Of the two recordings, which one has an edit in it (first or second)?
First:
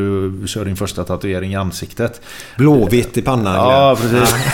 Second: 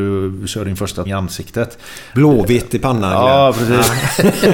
second